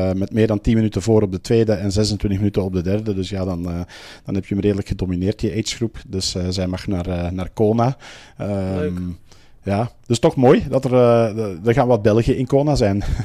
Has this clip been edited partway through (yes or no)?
no